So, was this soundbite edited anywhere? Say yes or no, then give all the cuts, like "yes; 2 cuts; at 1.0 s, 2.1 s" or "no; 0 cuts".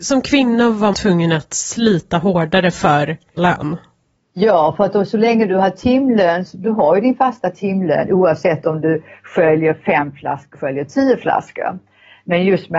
yes; 4 cuts; at 0.9 s, 3.4 s, 6.5 s, 10.5 s